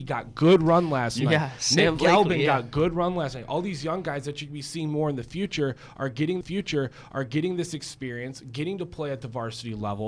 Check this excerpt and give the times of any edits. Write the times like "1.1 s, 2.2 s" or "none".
6.4 s